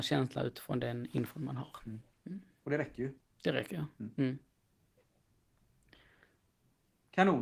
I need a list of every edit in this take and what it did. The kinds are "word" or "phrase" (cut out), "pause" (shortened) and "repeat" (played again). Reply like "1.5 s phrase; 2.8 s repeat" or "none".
none